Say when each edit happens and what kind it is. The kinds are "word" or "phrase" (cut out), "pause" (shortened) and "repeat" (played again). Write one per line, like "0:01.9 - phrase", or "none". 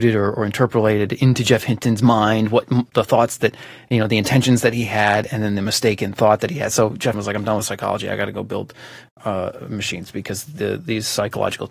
0:07.1 - word